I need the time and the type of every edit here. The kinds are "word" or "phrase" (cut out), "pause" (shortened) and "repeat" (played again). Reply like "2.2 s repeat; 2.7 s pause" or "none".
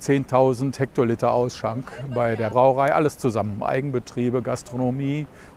2.5 s word